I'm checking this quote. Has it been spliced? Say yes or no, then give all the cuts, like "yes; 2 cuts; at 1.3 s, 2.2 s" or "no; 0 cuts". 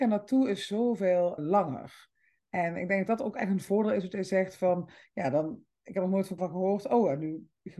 yes; 2 cuts; at 1.4 s, 6.4 s